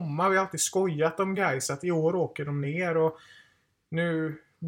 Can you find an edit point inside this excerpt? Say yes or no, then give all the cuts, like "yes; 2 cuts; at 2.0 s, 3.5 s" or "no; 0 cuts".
no; 0 cuts